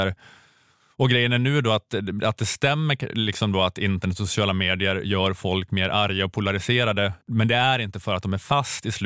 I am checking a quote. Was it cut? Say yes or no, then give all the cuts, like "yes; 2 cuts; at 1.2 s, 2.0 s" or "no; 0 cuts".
yes; 1 cut; at 7.2 s